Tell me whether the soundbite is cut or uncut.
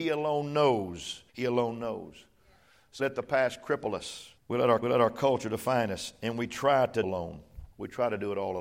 cut